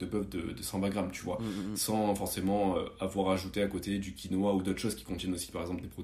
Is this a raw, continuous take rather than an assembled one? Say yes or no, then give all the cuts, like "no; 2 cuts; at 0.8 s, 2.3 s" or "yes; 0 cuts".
yes; 0 cuts